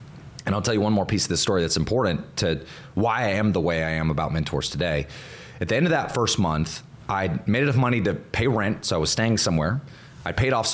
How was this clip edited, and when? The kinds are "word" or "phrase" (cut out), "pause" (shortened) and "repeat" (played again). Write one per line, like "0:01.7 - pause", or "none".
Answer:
none

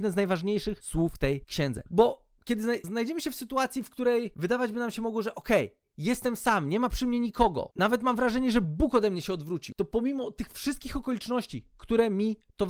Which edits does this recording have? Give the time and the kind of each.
none

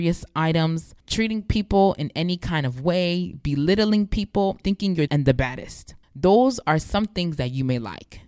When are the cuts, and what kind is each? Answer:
0:01.0 - pause
0:04.6 - word
0:05.1 - phrase
0:06.0 - pause

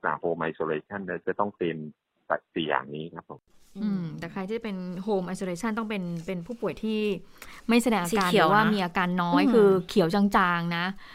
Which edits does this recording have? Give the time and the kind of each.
none

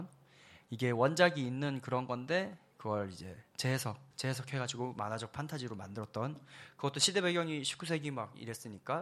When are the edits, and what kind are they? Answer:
0:04.1 - pause

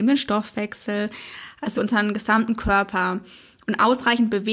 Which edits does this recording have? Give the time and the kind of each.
0:01.8 - word

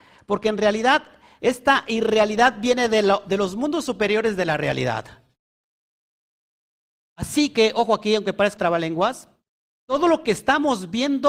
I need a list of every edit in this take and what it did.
0:08.6 - word

